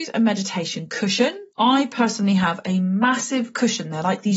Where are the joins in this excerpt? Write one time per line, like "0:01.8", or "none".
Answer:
0:01.5